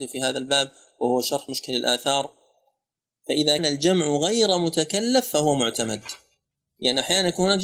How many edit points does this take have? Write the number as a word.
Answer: one